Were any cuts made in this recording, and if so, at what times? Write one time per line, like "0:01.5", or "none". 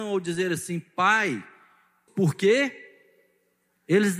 0:02.1